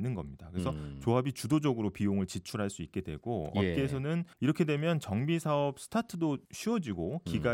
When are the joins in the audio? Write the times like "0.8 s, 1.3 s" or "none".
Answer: 4.3 s, 6.4 s